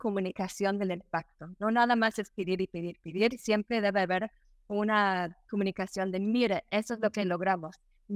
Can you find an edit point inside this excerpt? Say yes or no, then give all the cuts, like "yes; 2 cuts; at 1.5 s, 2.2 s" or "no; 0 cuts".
no; 0 cuts